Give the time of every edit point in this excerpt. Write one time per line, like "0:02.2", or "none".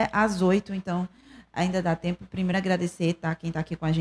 none